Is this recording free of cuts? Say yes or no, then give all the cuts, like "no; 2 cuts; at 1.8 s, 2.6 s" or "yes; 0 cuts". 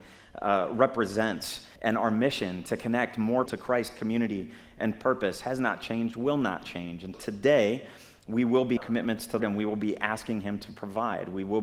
no; 5 cuts; at 1.8 s, 3.5 s, 7.1 s, 8.8 s, 9.4 s